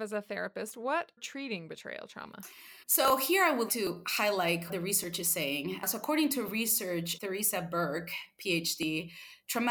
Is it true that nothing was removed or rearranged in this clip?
no; 5 cuts; at 1.2 s, 2.8 s, 3.7 s, 4.7 s, 7.2 s

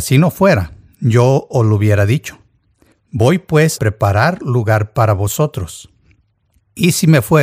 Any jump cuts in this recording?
yes; 1 cut; at 3.8 s

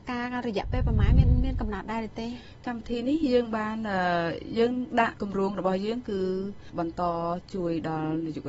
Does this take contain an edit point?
no; 0 cuts

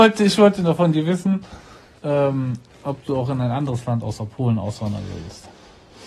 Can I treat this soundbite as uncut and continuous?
yes; 0 cuts

